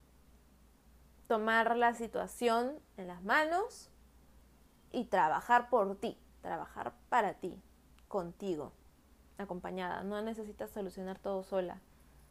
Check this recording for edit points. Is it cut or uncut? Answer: uncut